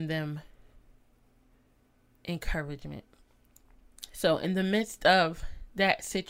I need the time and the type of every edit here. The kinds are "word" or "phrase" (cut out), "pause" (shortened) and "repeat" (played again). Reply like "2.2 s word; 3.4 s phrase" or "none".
none